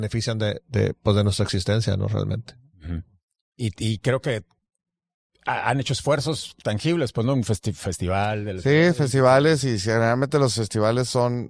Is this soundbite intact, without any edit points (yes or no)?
yes